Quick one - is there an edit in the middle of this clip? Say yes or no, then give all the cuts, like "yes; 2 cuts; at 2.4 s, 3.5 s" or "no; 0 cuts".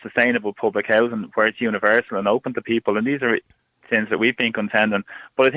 no; 0 cuts